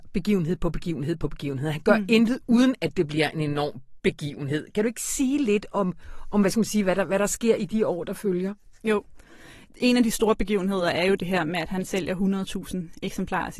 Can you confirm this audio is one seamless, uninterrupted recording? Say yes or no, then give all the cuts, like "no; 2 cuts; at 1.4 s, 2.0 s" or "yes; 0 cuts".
yes; 0 cuts